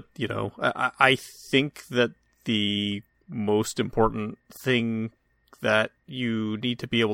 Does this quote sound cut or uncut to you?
uncut